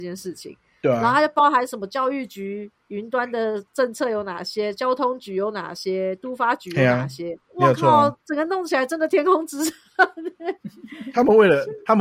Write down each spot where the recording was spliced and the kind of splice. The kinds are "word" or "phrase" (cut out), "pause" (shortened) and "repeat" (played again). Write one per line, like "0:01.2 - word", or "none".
0:03.7 - pause
0:07.4 - pause
0:08.2 - pause